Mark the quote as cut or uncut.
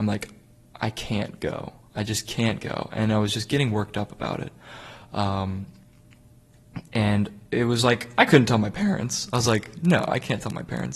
uncut